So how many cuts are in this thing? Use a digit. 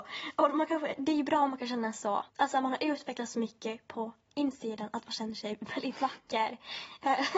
1